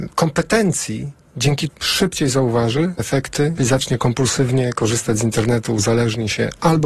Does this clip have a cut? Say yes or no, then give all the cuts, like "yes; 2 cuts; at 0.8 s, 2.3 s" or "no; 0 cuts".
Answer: yes; 3 cuts; at 1.7 s, 3.0 s, 3.6 s